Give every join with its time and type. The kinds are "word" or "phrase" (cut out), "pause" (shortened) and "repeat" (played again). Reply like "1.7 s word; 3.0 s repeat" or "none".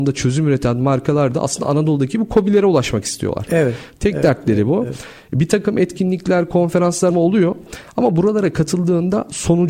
7.1 s word